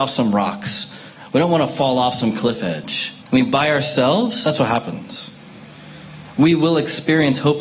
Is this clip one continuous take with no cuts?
no; 1 cut; at 3.2 s

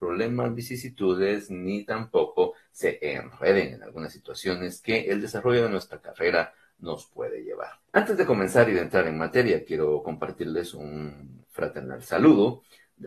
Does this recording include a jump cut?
yes; 2 cuts; at 7.8 s, 11.4 s

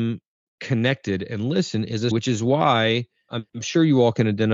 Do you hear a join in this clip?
yes; 2 cuts; at 2.1 s, 3.3 s

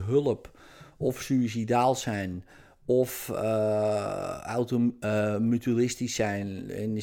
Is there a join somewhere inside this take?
no; 0 cuts

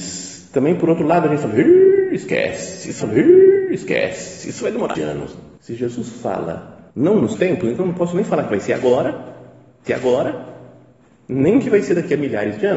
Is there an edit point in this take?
yes; 6 cuts; at 3.0 s, 4.9 s, 5.6 s, 6.9 s, 7.3 s, 9.9 s

